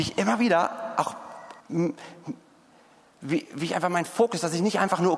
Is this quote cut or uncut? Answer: cut